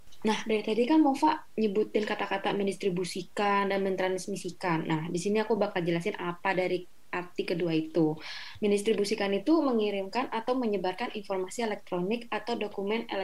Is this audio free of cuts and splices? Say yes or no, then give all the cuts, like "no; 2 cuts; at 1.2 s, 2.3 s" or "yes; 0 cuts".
yes; 0 cuts